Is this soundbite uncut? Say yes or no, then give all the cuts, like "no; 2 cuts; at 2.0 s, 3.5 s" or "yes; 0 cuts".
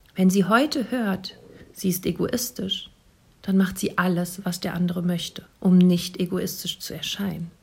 no; 1 cut; at 5.5 s